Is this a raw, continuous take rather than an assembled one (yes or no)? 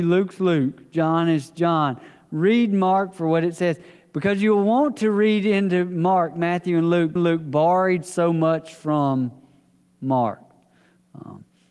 no